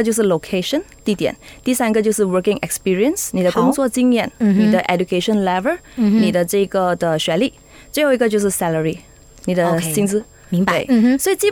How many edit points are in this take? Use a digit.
0